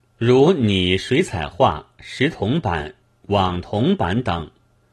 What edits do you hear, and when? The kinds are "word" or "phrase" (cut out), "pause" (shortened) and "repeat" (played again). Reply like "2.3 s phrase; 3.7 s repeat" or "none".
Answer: 3.0 s pause